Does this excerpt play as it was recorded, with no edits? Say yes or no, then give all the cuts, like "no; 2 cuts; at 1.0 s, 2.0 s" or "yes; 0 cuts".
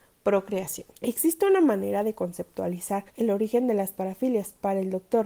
no; 2 cuts; at 0.9 s, 3.1 s